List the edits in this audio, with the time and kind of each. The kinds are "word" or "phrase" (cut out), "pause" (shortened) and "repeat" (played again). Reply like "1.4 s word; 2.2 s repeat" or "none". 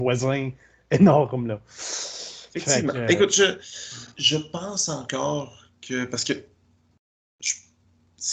4.1 s pause